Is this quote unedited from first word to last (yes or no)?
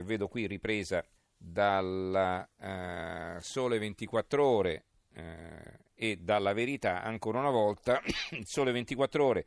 no